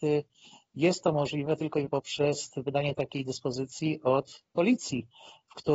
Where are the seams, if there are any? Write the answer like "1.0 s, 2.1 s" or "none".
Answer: 1.9 s